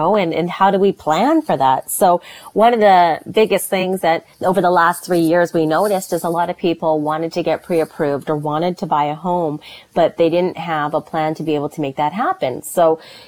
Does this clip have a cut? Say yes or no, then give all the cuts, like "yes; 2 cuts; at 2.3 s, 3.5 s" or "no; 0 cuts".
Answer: yes; 1 cut; at 4.3 s